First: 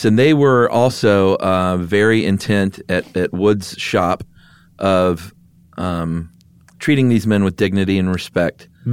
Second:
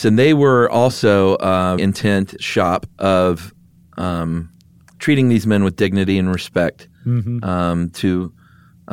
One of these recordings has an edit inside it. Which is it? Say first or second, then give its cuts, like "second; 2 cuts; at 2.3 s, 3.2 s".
second; 3 cuts; at 1.8 s, 2.4 s, 2.9 s